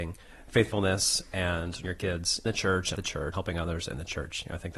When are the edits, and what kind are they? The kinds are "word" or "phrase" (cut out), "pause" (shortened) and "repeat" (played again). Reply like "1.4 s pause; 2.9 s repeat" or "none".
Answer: 1.8 s word; 2.5 s word; 3.0 s word; 3.3 s word